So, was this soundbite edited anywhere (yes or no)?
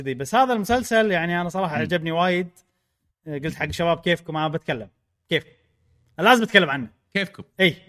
no